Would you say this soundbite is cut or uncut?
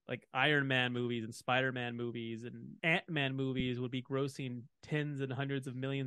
cut